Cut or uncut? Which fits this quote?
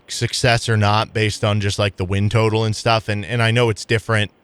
uncut